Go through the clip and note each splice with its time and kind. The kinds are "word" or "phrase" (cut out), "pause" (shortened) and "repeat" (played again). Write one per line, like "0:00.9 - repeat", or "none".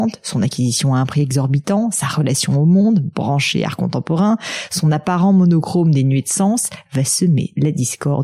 none